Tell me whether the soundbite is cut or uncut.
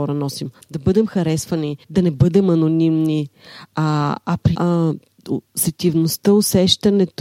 cut